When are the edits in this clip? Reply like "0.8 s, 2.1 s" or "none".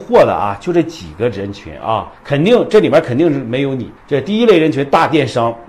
2.2 s, 4.0 s